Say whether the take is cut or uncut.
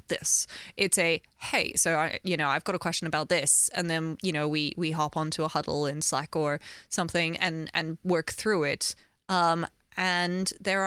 uncut